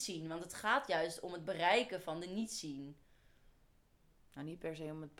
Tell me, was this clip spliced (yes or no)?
no